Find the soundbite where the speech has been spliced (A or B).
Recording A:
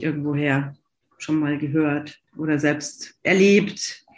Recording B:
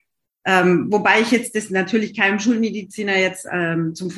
A